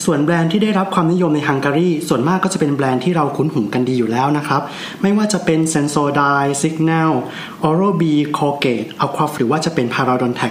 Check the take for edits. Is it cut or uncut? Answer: cut